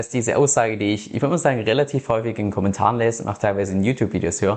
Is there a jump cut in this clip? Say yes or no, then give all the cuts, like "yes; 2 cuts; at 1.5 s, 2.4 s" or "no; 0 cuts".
no; 0 cuts